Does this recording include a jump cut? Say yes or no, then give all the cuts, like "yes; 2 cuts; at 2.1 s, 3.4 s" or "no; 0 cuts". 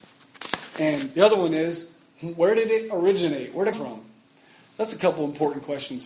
yes; 1 cut; at 3.7 s